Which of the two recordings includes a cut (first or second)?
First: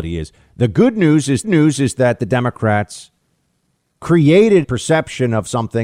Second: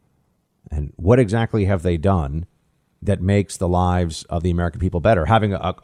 first